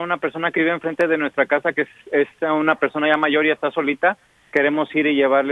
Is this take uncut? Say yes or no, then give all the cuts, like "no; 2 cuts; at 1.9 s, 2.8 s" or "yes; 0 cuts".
yes; 0 cuts